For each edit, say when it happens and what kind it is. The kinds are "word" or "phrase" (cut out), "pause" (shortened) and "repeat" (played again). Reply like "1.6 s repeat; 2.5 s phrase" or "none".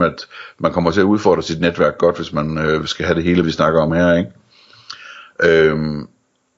3.4 s word

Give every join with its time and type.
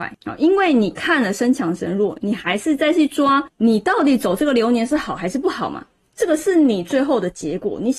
none

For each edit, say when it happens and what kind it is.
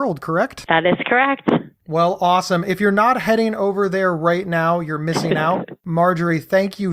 none

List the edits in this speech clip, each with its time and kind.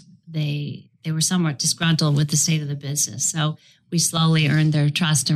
none

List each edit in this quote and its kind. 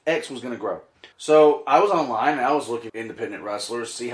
1.1 s pause; 2.9 s word

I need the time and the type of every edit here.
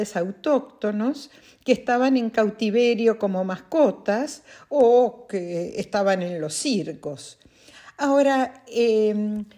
none

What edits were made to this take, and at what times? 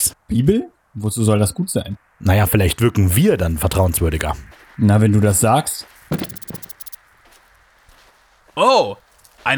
none

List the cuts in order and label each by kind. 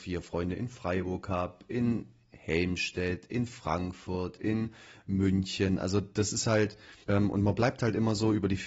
7.0 s pause

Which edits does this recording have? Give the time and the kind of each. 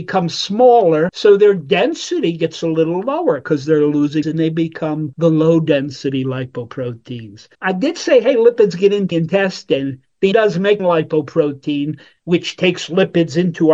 4.2 s word; 7.5 s pause; 9.1 s word; 10.3 s word; 10.8 s phrase

